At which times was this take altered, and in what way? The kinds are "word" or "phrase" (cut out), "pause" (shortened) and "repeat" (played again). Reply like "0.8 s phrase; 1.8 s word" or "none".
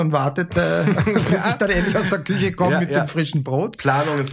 none